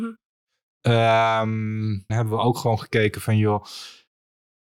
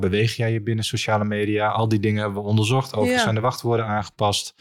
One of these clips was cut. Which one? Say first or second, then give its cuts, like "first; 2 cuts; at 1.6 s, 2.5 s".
first; 1 cut; at 2.1 s